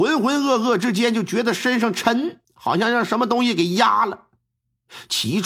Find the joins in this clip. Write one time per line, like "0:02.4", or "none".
0:02.4